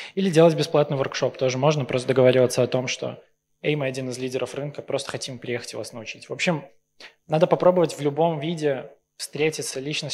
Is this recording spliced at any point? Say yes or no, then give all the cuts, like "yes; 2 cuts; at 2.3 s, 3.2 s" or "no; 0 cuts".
no; 0 cuts